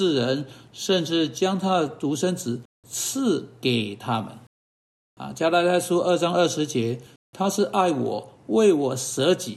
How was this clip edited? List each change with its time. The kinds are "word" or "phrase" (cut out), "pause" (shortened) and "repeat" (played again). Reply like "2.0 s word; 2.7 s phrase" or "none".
none